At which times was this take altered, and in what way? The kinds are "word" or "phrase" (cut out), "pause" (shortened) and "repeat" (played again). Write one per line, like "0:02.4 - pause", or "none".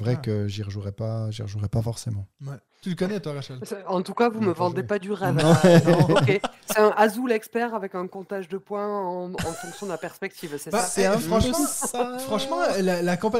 0:02.7 - pause